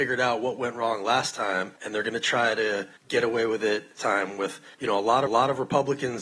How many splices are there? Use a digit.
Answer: 5